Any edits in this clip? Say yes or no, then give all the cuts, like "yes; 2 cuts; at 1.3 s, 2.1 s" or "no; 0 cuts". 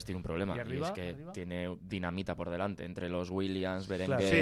no; 0 cuts